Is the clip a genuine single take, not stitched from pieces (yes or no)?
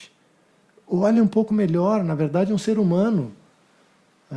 yes